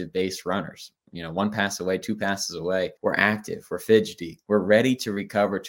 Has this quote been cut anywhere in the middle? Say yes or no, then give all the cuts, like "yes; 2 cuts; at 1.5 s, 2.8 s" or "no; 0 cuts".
yes; 1 cut; at 3.0 s